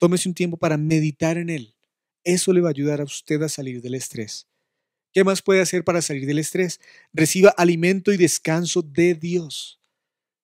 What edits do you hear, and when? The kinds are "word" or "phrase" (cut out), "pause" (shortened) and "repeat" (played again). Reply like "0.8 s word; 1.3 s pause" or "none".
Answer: none